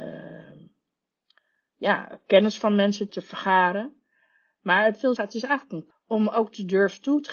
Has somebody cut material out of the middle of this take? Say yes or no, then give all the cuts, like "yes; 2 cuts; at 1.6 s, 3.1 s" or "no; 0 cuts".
yes; 3 cuts; at 3.1 s, 5.2 s, 5.9 s